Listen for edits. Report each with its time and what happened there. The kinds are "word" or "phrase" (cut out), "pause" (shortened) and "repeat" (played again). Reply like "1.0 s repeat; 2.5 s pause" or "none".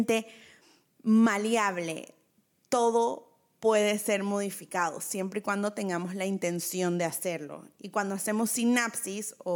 none